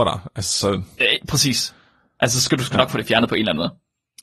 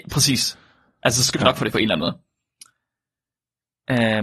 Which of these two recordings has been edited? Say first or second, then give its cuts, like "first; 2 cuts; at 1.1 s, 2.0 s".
second; 2 cuts; at 1.3 s, 1.7 s